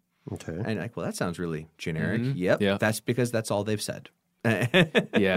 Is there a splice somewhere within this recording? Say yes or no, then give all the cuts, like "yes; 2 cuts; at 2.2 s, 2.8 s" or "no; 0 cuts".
no; 0 cuts